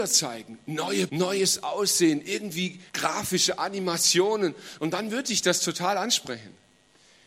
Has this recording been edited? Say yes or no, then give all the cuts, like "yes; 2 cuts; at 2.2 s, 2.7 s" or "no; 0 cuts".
yes; 2 cuts; at 1.1 s, 2.9 s